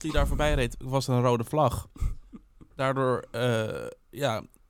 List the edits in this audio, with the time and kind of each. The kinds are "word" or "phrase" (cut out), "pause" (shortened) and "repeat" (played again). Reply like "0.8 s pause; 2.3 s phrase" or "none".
none